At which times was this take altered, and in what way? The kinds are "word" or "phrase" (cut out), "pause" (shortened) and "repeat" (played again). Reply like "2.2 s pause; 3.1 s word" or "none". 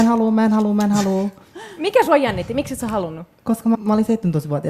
3.4 s pause; 3.7 s word